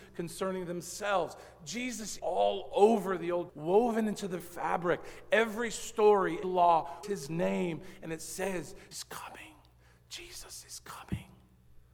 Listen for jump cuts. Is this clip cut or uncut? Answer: cut